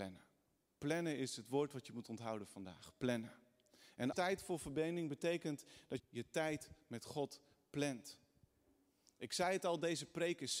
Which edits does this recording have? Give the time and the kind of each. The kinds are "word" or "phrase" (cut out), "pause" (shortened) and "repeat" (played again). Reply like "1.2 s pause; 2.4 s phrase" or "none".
4.1 s word; 6.0 s word